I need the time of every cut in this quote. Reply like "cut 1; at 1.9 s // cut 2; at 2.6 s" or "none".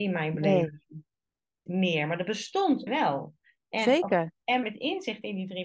cut 1; at 1.7 s // cut 2; at 2.9 s // cut 3; at 4.6 s